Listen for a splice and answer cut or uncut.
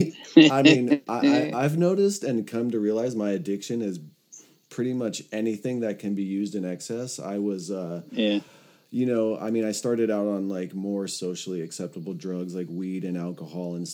uncut